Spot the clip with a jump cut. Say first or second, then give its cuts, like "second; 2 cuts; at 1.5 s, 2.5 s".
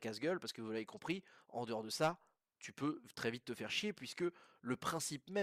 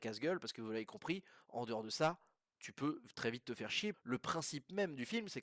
second; 1 cut; at 3.9 s